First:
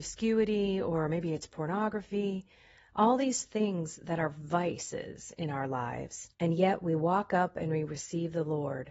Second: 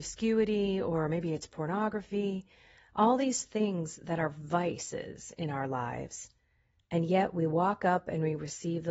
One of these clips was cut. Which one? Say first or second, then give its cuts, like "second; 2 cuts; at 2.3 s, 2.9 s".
first; 1 cut; at 6.3 s